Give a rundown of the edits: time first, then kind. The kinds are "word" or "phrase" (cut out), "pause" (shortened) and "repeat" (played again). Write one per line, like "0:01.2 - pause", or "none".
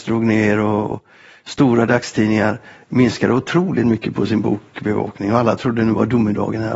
0:00.9 - word